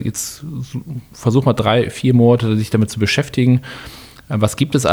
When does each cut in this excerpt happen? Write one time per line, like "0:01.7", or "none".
none

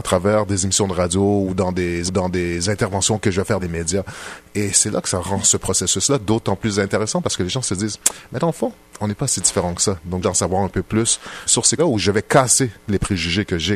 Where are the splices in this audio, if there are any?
0:02.1
0:03.6
0:10.2
0:11.5
0:11.8

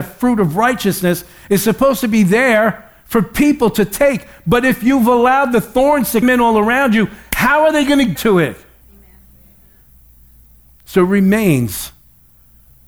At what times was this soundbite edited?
0:06.2
0:08.2

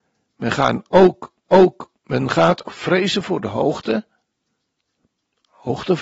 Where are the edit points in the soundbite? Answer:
0:01.5
0:02.7

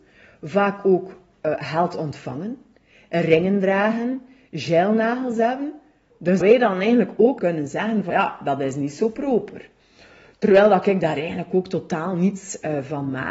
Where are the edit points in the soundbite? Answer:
0:06.4
0:07.4
0:08.1

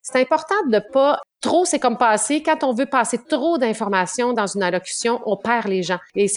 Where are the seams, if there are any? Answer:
none

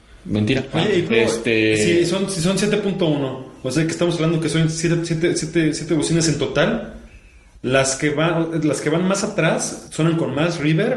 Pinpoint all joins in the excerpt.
0:01.1

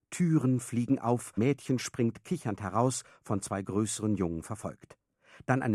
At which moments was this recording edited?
0:01.4

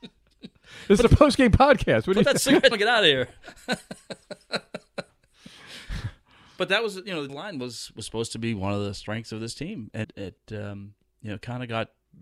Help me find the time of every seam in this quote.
0:01.1
0:02.7
0:07.3
0:10.0

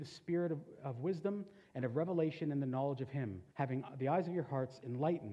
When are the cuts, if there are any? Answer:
0:03.5

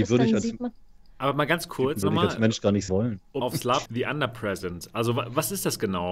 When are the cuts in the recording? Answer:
0:02.0
0:02.9
0:03.4
0:03.8

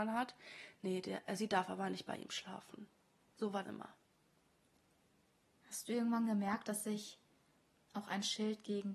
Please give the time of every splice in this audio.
0:03.6

